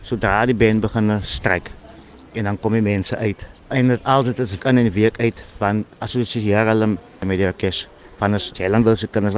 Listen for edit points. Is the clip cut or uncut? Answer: cut